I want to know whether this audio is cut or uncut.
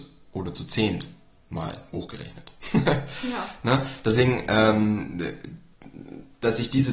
cut